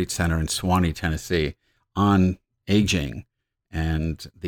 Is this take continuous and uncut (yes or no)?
yes